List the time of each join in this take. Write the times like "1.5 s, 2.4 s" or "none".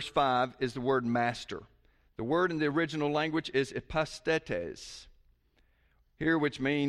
none